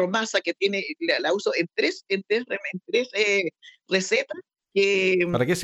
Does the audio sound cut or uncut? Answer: uncut